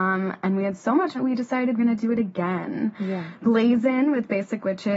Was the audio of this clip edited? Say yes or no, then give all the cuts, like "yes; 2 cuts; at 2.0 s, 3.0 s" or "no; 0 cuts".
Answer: yes; 2 cuts; at 1.1 s, 1.8 s